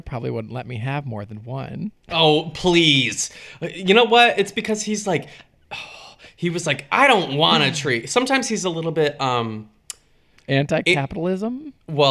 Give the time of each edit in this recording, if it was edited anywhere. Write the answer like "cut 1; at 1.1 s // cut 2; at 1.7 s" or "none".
none